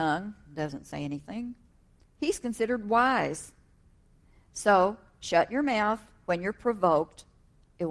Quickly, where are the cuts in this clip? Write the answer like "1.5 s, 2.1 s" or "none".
none

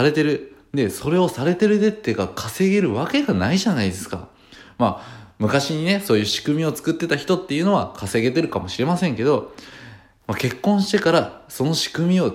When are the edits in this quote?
none

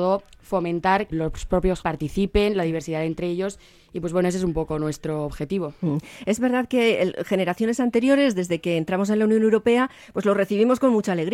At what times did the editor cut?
1.1 s, 1.8 s

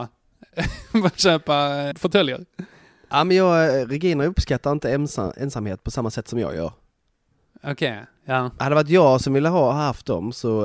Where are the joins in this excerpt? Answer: 1.9 s

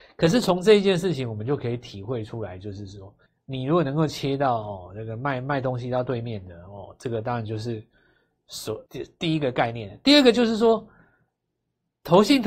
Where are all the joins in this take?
3.3 s, 8.9 s

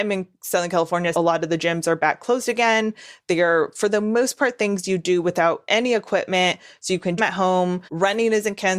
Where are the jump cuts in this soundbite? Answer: 1.1 s, 7.2 s, 7.9 s

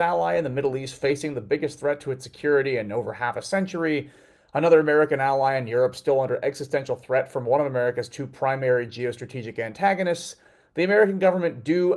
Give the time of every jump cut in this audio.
none

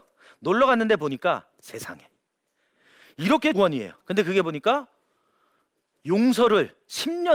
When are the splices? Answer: 3.5 s, 4.0 s

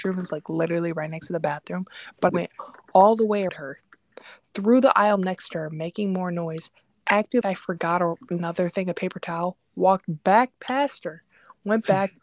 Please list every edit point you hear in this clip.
2.3 s, 3.5 s, 7.4 s

